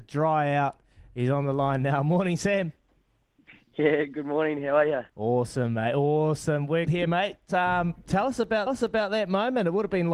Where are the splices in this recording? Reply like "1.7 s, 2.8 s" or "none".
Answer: 5.1 s, 6.9 s, 8.7 s